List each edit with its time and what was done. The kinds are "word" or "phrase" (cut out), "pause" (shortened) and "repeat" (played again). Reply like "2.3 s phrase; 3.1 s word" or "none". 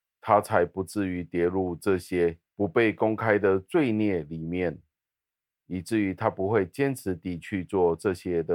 none

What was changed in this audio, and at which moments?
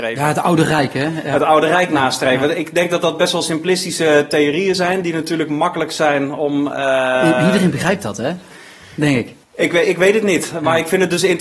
9.4 s pause

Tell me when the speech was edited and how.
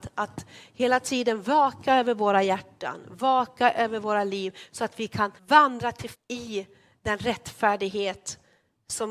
5.4 s pause; 6.1 s word

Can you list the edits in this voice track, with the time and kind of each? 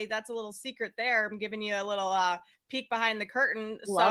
none

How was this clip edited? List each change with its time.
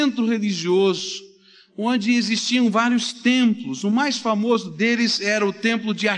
none

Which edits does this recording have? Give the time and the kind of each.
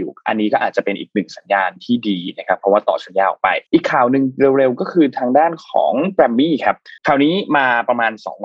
3.7 s pause; 7.0 s pause

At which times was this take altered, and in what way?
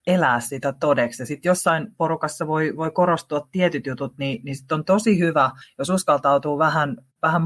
none

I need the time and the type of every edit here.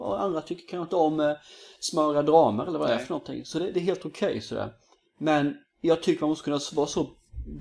none

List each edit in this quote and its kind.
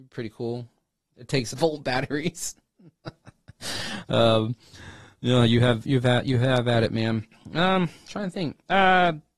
1.5 s phrase

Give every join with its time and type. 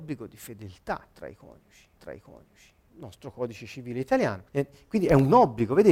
2.0 s repeat; 4.5 s pause

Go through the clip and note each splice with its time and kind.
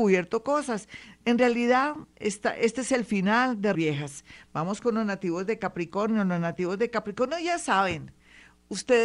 3.7 s word

